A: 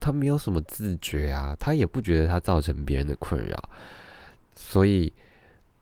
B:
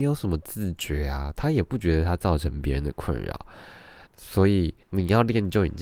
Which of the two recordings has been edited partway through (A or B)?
B